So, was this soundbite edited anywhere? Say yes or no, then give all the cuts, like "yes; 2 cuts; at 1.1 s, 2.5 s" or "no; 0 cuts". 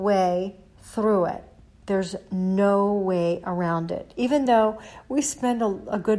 no; 0 cuts